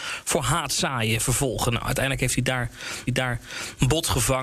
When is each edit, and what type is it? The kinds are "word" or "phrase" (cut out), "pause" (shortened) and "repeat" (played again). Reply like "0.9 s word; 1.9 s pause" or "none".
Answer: 3.1 s repeat